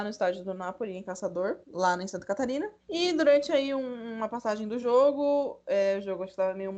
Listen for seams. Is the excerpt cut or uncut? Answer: cut